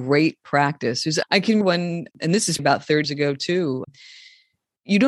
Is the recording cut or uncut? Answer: cut